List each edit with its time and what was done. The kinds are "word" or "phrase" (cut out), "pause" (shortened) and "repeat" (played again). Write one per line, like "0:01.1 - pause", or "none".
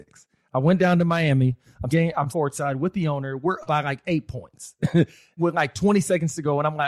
0:01.9 - word
0:02.3 - word
0:03.6 - word
0:05.4 - word